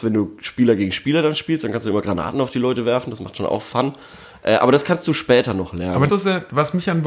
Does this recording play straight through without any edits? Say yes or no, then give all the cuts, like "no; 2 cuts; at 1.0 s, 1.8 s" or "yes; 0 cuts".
no; 1 cut; at 6.1 s